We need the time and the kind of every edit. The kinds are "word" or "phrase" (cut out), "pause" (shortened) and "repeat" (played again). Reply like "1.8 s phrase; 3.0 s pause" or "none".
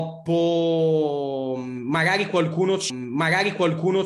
2.9 s repeat

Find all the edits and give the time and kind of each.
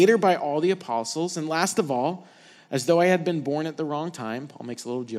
none

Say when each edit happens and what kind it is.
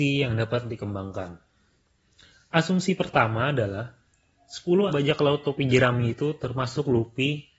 4.9 s word

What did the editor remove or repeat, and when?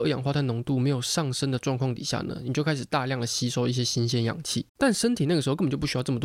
4.7 s pause

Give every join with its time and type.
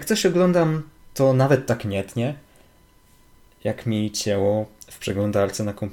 none

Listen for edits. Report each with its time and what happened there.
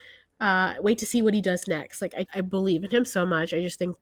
2.3 s word

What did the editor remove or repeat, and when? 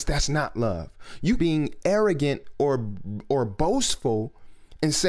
1.4 s phrase

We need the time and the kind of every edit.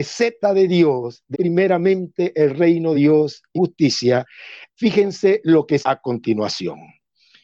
1.3 s word; 2.9 s word; 3.5 s word; 4.7 s word; 5.8 s word

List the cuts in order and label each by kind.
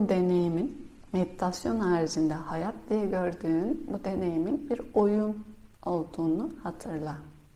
5.7 s pause

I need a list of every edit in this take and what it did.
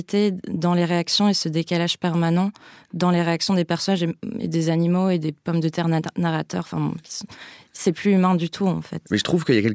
none

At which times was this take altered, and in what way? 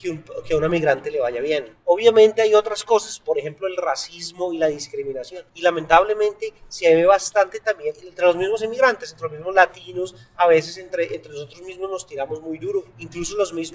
5.5 s pause

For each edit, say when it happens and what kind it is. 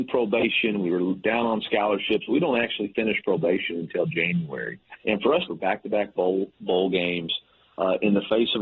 5.0 s pause; 5.5 s phrase

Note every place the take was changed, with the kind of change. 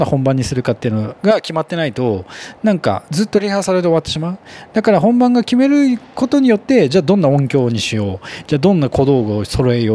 1.2 s pause

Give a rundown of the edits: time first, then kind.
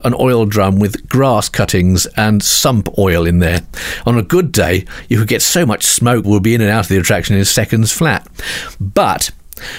6.2 s phrase

